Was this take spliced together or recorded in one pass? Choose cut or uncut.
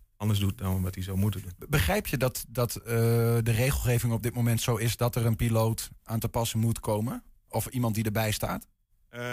uncut